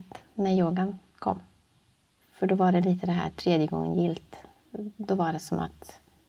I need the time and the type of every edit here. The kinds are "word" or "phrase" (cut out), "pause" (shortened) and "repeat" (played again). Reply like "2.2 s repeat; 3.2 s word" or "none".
none